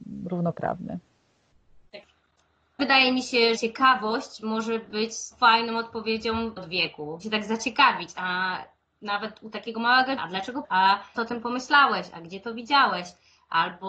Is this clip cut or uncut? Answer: cut